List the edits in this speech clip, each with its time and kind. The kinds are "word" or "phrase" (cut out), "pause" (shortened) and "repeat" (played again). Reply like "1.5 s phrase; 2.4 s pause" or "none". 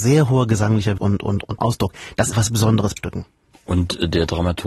1.0 s word; 1.6 s word; 2.3 s word; 3.0 s word